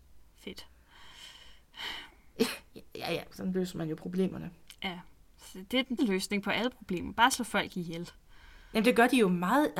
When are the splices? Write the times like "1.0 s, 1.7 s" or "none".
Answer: 6.0 s